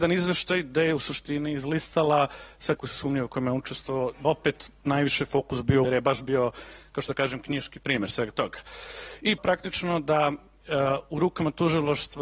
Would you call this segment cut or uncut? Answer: cut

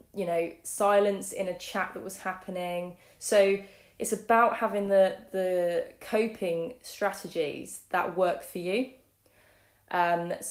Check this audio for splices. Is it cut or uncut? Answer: uncut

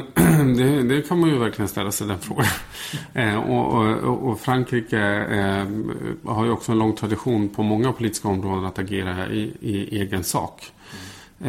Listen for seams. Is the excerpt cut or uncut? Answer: uncut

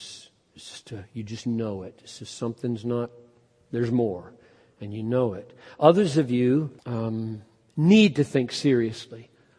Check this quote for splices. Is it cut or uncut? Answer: cut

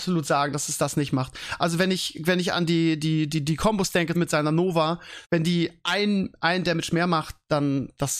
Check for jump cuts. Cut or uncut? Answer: cut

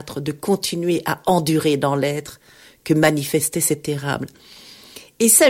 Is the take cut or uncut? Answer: uncut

